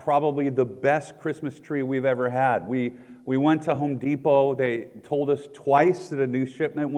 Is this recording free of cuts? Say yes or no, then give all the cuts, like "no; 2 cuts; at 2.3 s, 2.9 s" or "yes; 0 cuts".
yes; 0 cuts